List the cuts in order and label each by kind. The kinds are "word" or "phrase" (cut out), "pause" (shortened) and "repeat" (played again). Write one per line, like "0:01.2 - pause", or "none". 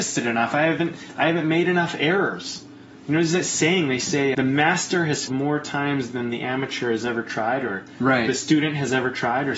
0:04.3 - word
0:05.3 - word